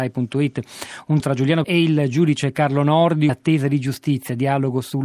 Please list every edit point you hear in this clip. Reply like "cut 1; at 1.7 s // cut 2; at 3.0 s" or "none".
cut 1; at 1.2 s // cut 2; at 1.6 s // cut 3; at 3.3 s